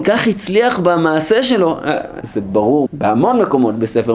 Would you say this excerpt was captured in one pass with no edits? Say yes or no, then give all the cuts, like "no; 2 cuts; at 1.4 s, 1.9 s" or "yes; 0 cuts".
no; 2 cuts; at 2.2 s, 2.9 s